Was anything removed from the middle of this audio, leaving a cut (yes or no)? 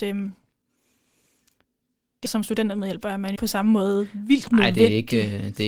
yes